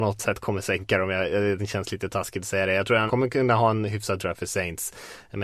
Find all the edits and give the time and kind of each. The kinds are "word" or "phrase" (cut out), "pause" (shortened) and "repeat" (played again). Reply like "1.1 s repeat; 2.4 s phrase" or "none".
3.1 s word; 4.2 s word

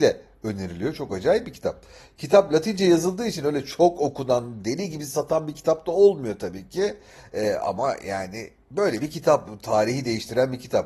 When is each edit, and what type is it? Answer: none

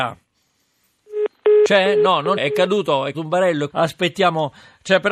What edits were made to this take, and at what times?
2.4 s word; 3.1 s word; 3.7 s word

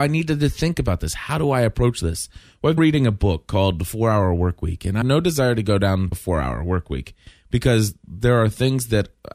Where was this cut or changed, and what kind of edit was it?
2.8 s word; 5.0 s word; 6.1 s word

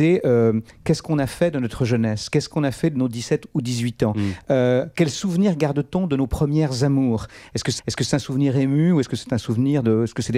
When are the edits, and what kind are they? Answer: 7.8 s repeat

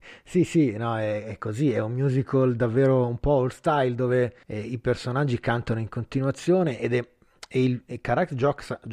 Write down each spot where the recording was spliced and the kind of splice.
4.4 s pause

